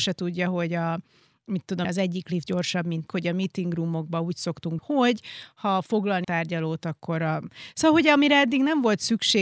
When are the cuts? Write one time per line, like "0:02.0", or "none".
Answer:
0:01.8
0:03.1
0:04.8
0:06.2